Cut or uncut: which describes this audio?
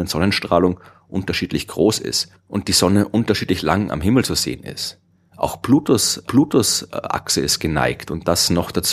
cut